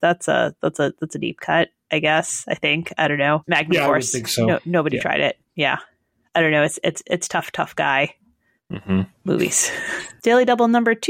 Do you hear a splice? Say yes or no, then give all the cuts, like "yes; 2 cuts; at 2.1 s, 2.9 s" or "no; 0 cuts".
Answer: no; 0 cuts